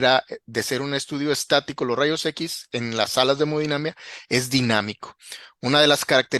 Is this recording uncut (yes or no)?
yes